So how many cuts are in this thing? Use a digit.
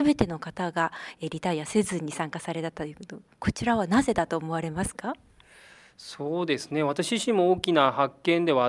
0